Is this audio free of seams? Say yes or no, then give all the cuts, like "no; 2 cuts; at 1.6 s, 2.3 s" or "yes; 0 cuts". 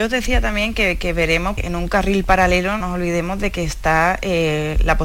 no; 2 cuts; at 1.6 s, 2.8 s